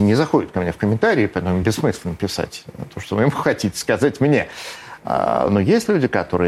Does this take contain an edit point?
no; 0 cuts

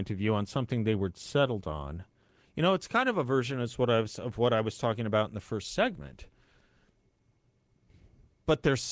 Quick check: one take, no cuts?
yes; 0 cuts

